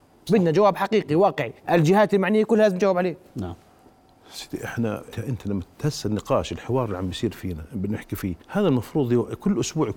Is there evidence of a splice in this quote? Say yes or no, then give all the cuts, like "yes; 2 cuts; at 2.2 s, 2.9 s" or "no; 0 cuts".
yes; 3 cuts; at 1.6 s, 5.1 s, 8.4 s